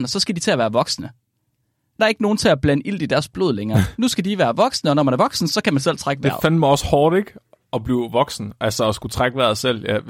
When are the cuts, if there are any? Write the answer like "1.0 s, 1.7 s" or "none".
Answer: 2.0 s